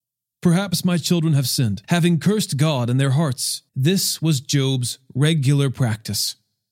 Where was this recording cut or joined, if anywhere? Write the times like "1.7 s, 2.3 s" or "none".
1.8 s, 3.7 s